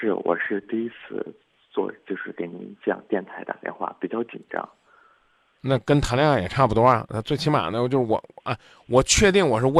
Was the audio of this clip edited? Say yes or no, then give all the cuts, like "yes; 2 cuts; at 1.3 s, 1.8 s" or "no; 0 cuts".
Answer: no; 0 cuts